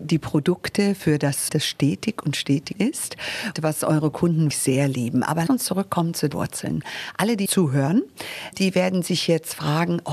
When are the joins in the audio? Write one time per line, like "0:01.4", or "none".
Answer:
0:01.5
0:02.7
0:03.6
0:04.5
0:05.5
0:06.3
0:07.5
0:08.5

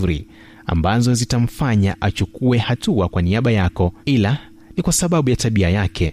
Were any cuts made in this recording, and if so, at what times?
0:04.0

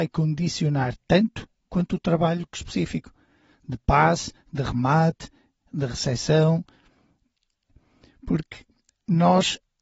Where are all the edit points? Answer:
0:02.5

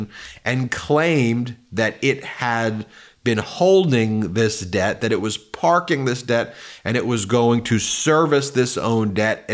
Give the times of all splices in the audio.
none

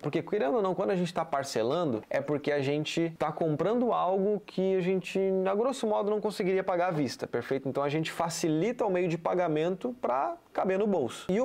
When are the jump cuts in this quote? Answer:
none

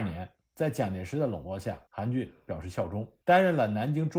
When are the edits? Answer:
0:01.9
0:03.2

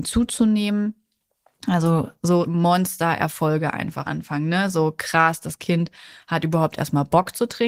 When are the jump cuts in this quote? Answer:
0:02.4
0:04.0

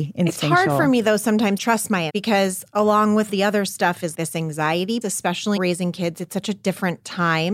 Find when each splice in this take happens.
0:01.6
0:02.1
0:03.3
0:04.1
0:05.0
0:05.6

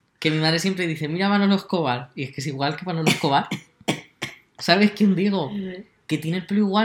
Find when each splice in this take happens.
none

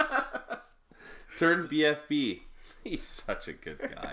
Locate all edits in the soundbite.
0:01.6

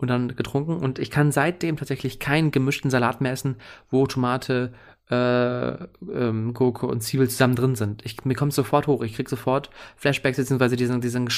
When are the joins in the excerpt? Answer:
none

